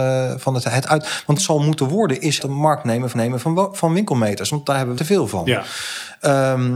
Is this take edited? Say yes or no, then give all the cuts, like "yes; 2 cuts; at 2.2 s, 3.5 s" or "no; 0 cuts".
yes; 4 cuts; at 1.4 s, 2.4 s, 3.1 s, 5.0 s